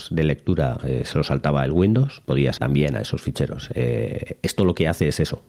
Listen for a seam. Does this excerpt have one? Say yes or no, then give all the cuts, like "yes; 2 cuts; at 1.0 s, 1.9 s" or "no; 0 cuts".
yes; 1 cut; at 2.6 s